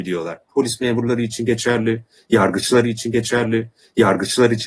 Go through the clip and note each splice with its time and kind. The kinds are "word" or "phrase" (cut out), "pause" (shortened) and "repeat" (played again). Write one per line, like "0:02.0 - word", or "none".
0:02.8 - repeat

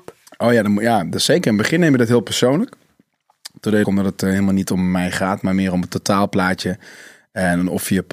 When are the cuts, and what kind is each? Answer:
0:03.8 - word

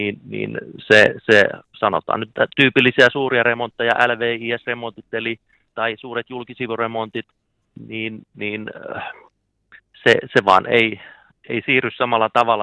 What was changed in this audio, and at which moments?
0:05.7 - word

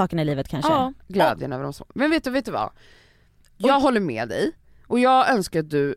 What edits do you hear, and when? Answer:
0:01.0 - pause

